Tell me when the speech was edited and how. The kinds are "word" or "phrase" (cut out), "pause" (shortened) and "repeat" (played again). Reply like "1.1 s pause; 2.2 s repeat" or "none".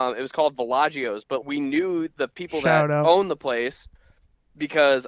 1.4 s word

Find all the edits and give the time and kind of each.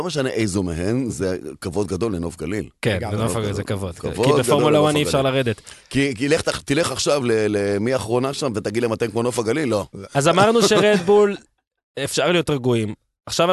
none

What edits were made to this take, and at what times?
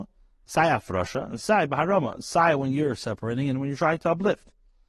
none

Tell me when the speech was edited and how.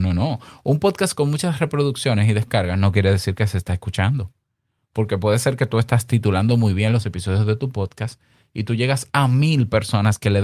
none

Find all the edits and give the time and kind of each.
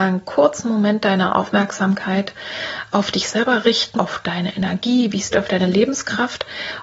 3.9 s word; 5.3 s phrase

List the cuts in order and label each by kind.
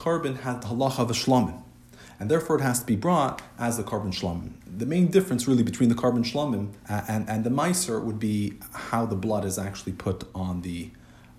4.6 s pause; 6.8 s pause

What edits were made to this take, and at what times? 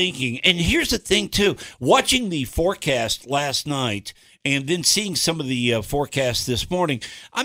none

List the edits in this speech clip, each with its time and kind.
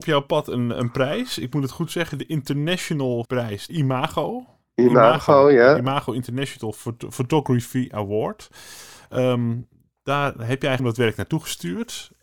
3.2 s word; 3.7 s word; 10.8 s word

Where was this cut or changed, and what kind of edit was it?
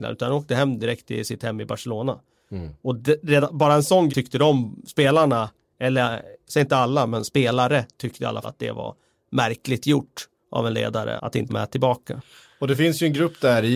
4.1 s word; 8.4 s word; 11.2 s word; 11.5 s word

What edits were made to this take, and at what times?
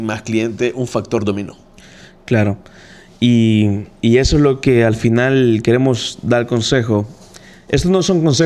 none

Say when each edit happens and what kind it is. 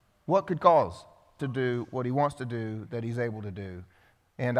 1.4 s phrase

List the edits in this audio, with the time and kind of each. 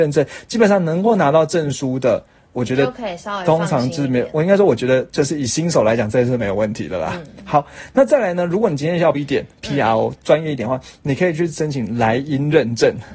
9.1 s word

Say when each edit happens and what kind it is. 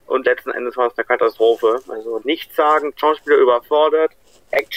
2.2 s word

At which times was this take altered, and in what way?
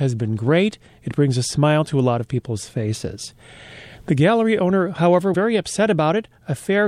5.3 s word

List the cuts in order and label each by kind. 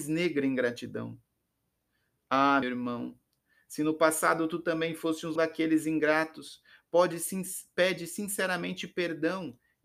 2.6 s word; 5.4 s word

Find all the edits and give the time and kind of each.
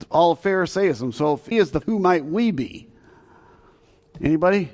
1.5 s phrase; 1.8 s word

